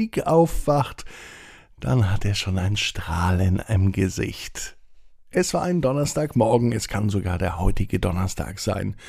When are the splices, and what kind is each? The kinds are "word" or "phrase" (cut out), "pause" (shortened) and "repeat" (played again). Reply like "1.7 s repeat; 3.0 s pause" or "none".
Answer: none